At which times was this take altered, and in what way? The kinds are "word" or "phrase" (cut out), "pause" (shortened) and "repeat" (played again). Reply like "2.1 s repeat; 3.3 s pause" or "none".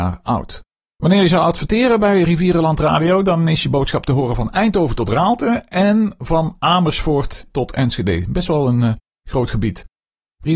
none